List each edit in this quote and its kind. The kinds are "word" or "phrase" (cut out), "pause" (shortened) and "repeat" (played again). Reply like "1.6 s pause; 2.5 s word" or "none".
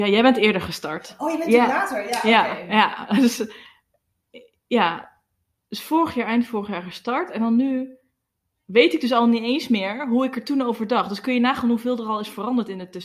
none